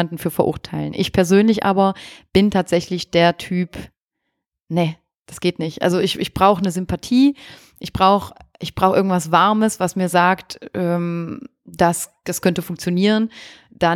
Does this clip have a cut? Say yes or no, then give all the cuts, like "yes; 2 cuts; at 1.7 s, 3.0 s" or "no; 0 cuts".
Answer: no; 0 cuts